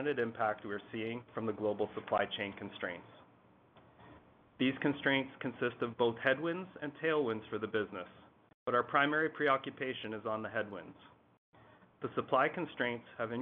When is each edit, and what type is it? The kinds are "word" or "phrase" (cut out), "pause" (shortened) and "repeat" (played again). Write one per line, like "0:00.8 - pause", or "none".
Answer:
none